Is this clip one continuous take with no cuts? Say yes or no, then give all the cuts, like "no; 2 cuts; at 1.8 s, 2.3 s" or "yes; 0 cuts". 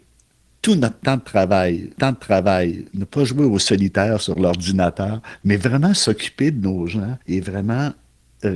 no; 2 cuts; at 2.0 s, 7.2 s